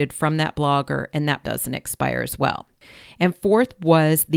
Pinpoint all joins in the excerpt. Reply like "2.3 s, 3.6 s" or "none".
1.4 s